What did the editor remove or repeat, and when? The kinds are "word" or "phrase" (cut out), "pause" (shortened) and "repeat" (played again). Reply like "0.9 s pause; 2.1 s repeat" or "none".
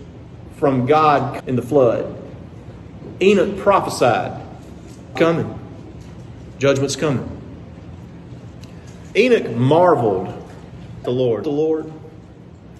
1.4 s word; 5.2 s word; 11.0 s word; 11.4 s phrase